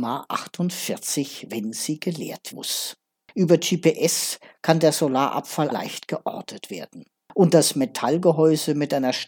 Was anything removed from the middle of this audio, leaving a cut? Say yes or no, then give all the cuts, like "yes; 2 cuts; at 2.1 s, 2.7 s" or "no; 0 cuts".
yes; 2 cuts; at 2.5 s, 5.7 s